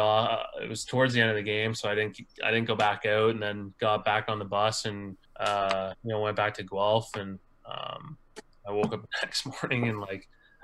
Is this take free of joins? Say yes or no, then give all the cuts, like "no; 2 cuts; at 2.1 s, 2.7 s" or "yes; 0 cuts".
no; 1 cut; at 5.2 s